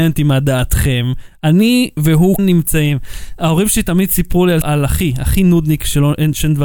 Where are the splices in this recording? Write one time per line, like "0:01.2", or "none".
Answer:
0:02.4
0:04.6

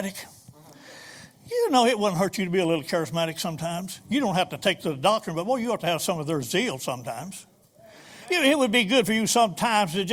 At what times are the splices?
none

